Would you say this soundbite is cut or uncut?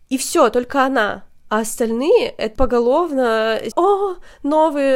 cut